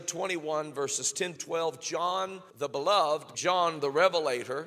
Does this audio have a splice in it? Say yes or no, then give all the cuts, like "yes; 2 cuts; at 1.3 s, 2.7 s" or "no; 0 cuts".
yes; 3 cuts; at 1.4 s, 2.5 s, 3.3 s